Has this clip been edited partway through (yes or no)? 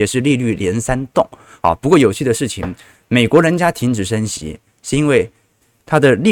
no